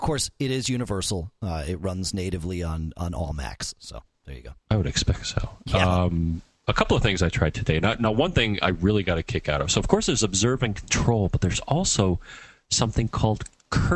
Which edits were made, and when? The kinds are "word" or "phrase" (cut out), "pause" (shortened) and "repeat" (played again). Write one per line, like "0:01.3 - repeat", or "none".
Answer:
none